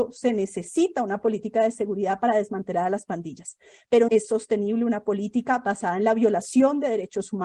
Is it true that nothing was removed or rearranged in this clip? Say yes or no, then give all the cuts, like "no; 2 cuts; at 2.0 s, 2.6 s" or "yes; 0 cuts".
no; 1 cut; at 4.1 s